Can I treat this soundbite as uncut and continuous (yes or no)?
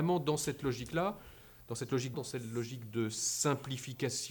no